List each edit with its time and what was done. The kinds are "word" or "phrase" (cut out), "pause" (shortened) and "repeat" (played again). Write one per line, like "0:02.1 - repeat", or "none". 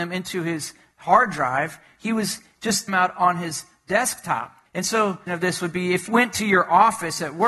0:02.9 - phrase
0:04.7 - pause
0:05.3 - phrase
0:06.1 - word